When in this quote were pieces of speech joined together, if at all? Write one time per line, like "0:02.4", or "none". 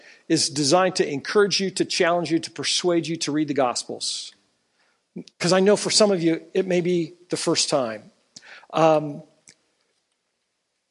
0:05.3